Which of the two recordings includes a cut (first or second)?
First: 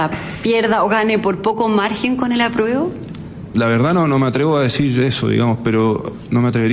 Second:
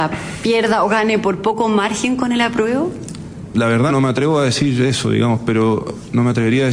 second